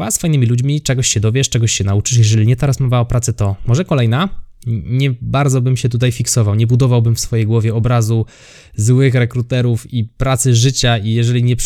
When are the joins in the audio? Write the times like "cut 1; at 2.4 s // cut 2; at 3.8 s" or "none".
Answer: none